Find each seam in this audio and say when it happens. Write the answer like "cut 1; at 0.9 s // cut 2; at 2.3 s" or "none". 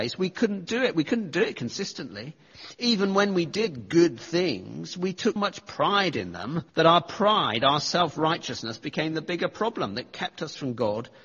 cut 1; at 5.4 s // cut 2; at 6.7 s